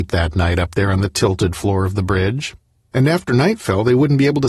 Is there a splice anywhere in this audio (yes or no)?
no